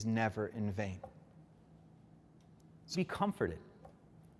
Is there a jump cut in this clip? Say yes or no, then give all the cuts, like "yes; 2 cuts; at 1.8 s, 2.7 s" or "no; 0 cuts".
yes; 1 cut; at 2.9 s